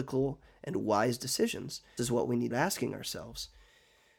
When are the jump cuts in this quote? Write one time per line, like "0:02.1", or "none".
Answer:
0:02.0
0:02.5

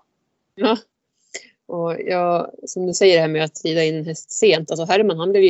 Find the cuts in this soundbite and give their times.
none

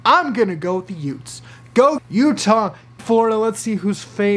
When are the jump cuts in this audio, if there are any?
0:02.0
0:03.0

